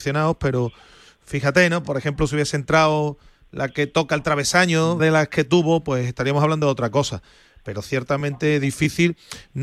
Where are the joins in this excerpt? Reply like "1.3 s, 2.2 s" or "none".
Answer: 5.0 s